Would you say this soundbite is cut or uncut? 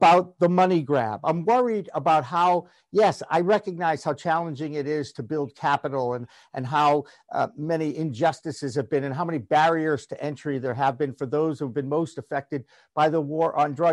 uncut